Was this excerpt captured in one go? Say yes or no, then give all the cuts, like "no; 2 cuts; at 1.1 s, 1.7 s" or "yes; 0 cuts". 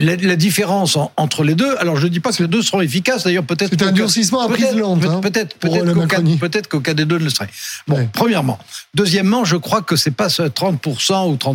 yes; 0 cuts